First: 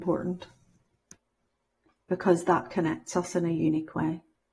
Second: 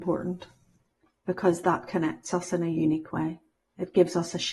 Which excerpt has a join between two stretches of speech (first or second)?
second